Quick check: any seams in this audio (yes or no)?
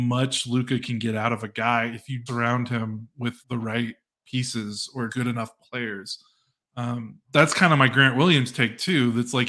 yes